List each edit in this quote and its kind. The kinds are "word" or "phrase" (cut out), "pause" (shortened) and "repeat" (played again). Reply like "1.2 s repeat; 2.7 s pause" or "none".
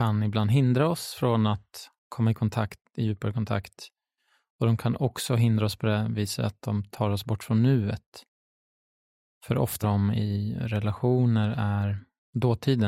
2.0 s pause; 9.8 s phrase